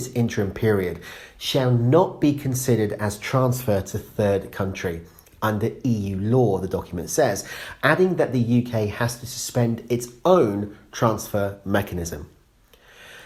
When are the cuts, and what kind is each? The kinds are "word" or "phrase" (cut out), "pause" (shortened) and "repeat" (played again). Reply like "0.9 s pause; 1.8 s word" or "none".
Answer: none